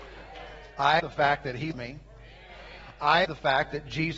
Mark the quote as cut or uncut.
cut